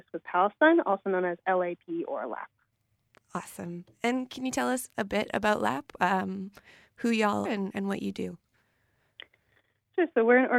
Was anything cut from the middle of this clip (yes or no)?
yes